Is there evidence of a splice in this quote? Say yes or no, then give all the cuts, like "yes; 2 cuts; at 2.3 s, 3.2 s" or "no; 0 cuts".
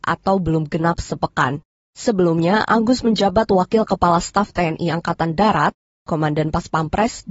no; 0 cuts